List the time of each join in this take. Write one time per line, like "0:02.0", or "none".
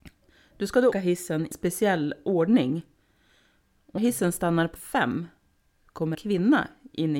0:00.9
0:01.5
0:04.0
0:04.8
0:06.1